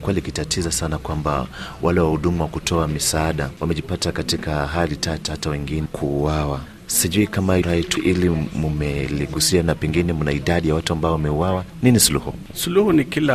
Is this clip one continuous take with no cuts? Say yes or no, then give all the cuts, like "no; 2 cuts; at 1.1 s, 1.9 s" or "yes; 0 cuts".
no; 3 cuts; at 5.9 s, 7.6 s, 8.0 s